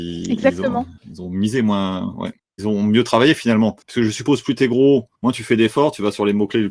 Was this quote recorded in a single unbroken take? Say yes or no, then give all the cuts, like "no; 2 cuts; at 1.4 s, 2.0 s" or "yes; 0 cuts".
no; 4 cuts; at 1.0 s, 2.4 s, 3.8 s, 5.1 s